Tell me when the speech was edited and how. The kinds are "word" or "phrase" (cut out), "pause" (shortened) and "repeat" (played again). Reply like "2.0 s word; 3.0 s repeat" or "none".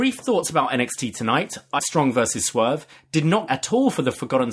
1.8 s word; 3.5 s word